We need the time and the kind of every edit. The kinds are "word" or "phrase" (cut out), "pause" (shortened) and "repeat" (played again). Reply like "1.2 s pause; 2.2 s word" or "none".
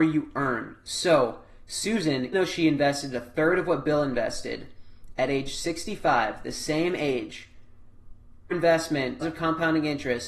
2.3 s word; 8.5 s word; 9.2 s word